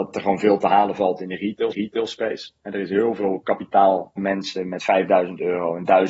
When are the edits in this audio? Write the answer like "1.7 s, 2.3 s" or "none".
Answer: 1.7 s, 4.2 s